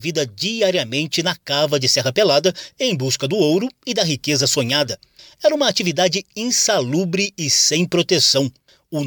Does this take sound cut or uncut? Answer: uncut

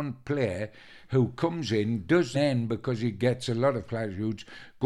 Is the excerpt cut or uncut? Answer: cut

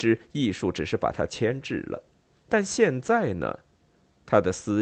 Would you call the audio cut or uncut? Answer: uncut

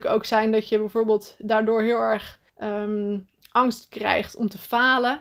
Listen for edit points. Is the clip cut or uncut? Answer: cut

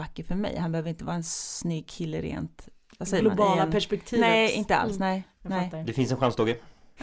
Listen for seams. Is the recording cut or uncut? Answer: uncut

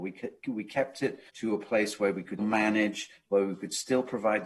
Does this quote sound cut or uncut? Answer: cut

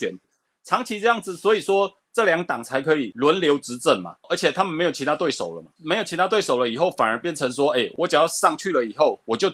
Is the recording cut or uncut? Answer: uncut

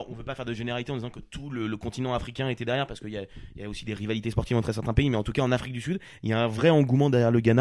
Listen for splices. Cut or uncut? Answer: uncut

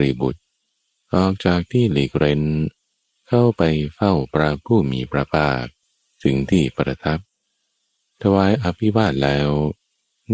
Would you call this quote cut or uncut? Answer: uncut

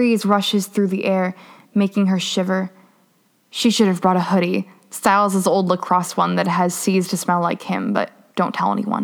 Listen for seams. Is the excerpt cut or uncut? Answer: uncut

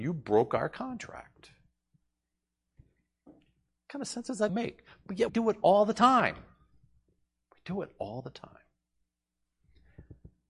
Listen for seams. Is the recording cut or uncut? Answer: cut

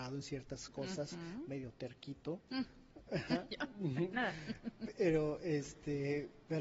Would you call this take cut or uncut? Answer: uncut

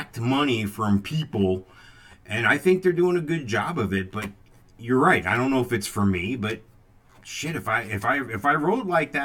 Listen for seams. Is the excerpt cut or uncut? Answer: uncut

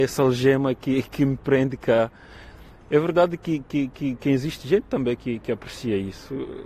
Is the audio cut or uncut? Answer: uncut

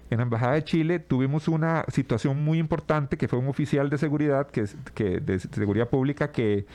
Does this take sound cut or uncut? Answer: uncut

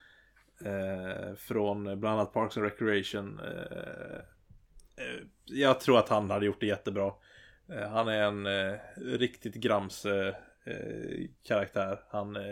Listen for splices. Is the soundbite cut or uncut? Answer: uncut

